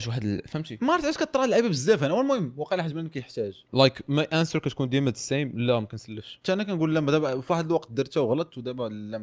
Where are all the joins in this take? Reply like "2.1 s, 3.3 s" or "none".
3.7 s